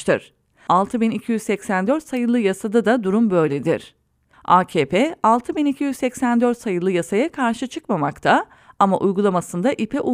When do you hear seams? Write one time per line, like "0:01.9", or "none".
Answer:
none